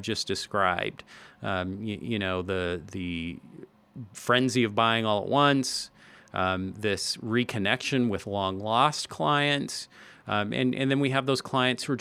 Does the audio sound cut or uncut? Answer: uncut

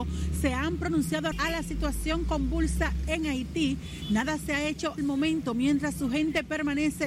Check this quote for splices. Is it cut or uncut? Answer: cut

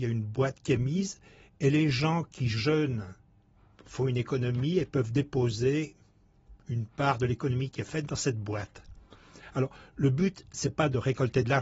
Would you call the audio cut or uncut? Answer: uncut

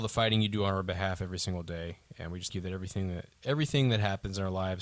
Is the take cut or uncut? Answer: cut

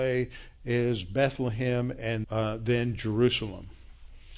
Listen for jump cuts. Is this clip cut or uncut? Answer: cut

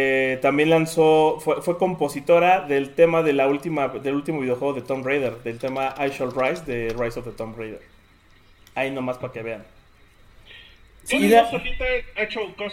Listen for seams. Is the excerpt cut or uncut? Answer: uncut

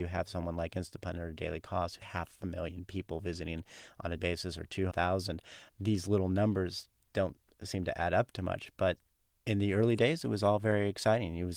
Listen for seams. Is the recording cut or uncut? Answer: cut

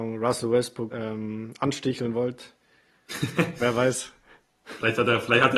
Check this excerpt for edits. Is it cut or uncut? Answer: cut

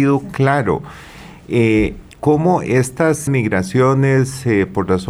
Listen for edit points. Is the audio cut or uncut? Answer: cut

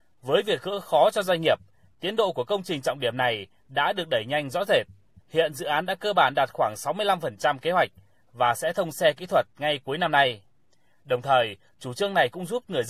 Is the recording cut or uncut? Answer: uncut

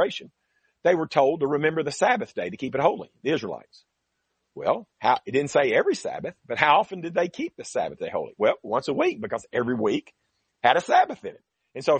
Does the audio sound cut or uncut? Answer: uncut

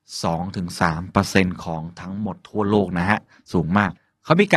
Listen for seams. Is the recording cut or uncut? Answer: uncut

